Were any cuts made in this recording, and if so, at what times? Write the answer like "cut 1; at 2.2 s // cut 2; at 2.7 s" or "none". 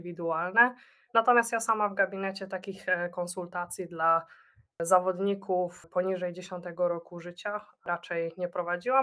none